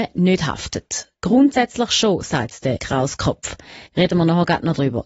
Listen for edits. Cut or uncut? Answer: cut